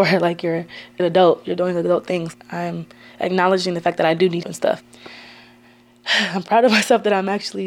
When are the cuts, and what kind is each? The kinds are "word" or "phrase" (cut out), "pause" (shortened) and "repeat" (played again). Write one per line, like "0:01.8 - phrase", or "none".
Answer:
0:01.0 - word
0:04.4 - word